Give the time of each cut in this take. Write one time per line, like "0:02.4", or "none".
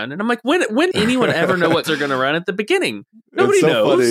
0:00.9
0:01.8